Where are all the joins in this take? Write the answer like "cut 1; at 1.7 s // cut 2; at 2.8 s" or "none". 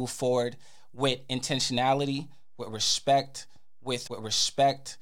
cut 1; at 4.1 s